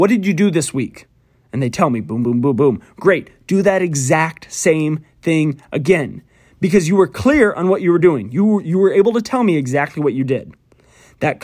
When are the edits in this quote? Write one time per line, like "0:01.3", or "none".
none